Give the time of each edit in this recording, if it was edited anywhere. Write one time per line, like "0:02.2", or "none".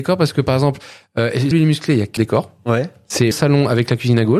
0:01.5
0:02.2
0:03.3